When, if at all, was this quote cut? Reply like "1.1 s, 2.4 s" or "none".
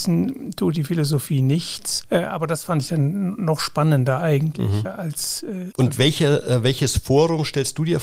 4.8 s